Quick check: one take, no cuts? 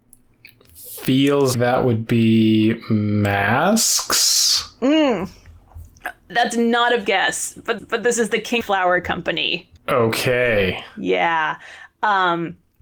no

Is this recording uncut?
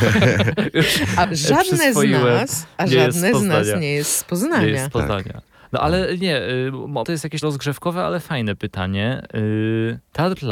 no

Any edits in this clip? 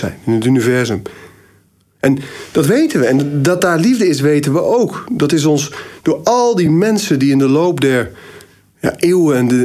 no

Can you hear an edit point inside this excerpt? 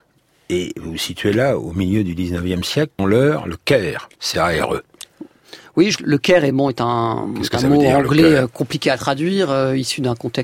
yes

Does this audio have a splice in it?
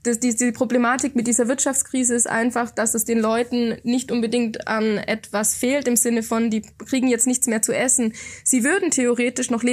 no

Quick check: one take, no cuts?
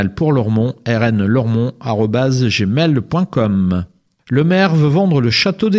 yes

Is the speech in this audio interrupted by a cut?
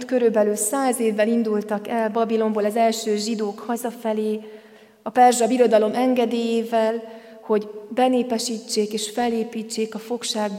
no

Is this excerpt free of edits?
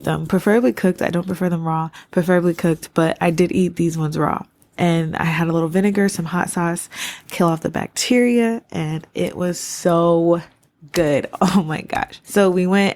yes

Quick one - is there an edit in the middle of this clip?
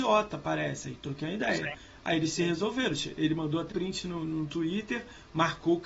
yes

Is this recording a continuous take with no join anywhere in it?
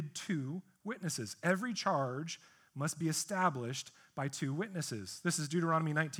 yes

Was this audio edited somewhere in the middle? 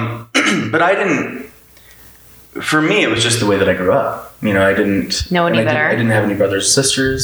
no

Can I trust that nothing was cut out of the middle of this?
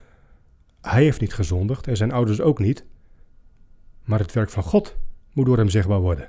yes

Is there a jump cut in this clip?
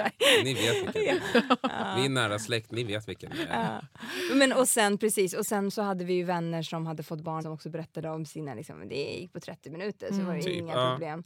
yes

